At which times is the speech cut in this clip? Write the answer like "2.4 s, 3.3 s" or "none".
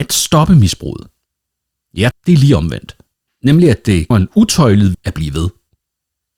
2.1 s, 4.1 s, 4.9 s